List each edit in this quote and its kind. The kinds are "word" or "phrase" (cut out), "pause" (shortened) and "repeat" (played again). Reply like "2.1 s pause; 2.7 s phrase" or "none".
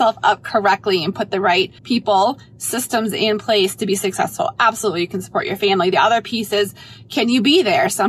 1.8 s pause